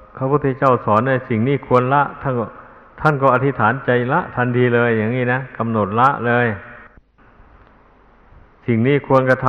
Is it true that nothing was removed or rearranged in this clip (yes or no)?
yes